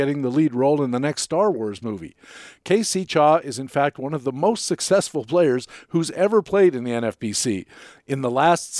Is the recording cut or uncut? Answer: uncut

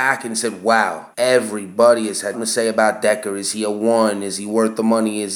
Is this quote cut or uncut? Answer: cut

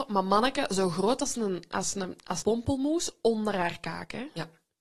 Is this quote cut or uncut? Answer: cut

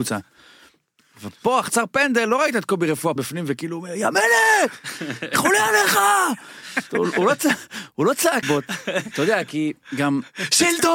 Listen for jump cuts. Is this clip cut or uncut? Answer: cut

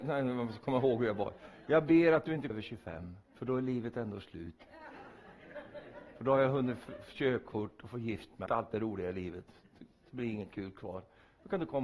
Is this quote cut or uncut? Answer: cut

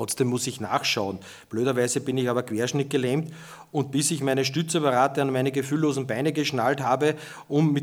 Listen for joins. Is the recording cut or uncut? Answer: uncut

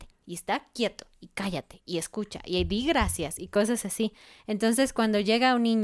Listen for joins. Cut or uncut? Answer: uncut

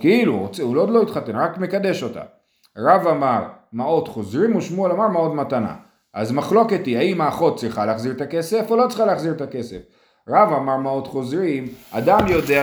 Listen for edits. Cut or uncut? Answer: uncut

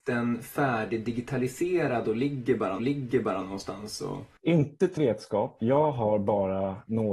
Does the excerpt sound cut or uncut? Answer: cut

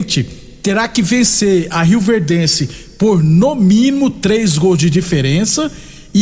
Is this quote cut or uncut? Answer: uncut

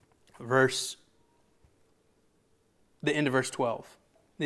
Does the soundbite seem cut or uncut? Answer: uncut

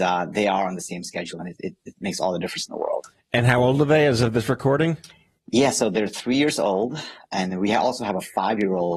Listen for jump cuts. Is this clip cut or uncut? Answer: cut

